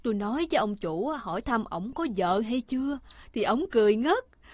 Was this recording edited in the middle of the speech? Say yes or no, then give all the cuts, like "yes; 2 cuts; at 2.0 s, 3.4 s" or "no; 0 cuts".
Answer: no; 0 cuts